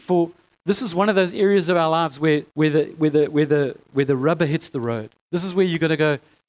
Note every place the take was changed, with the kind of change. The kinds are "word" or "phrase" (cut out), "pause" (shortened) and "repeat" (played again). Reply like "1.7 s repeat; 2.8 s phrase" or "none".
2.5 s pause; 5.2 s pause